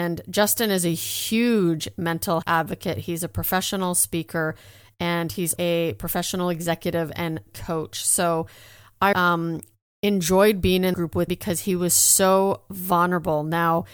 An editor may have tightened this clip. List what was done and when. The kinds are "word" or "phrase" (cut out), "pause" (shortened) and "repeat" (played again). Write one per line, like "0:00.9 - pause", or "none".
0:02.4 - word
0:05.6 - word
0:07.5 - word
0:09.1 - word
0:10.9 - word
0:11.3 - word

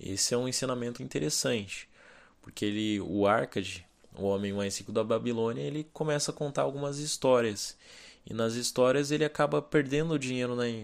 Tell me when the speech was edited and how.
0:01.0 - word

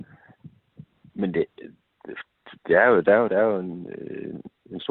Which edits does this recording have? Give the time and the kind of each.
0:03.3 - word

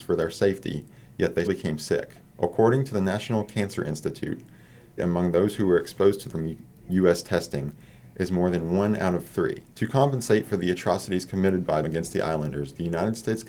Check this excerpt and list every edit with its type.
0:01.5 - word
0:02.2 - pause
0:05.0 - phrase
0:06.3 - word
0:09.7 - pause
0:11.8 - word

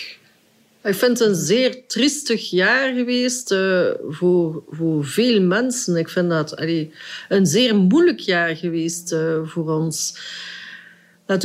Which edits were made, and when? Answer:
none

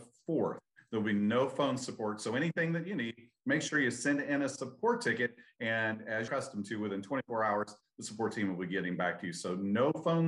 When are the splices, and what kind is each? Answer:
0:06.3 - word

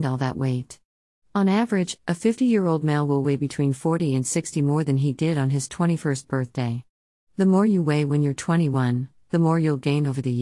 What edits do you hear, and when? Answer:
none

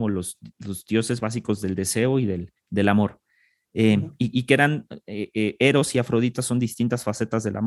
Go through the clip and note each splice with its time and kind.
0:02.6 - pause

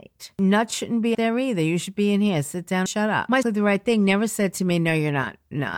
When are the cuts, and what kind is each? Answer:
0:01.1 - word
0:02.9 - word
0:03.4 - phrase

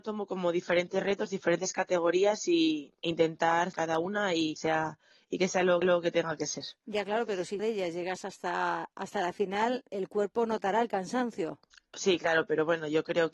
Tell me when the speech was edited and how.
0:03.7 - phrase
0:04.6 - word
0:05.8 - repeat
0:07.6 - phrase
0:09.9 - word
0:11.7 - pause

